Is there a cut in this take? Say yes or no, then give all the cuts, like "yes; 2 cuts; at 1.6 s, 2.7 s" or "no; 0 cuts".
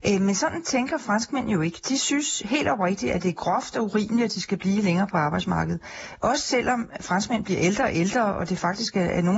no; 0 cuts